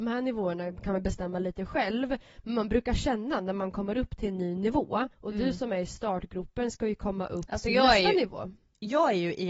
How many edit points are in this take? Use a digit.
1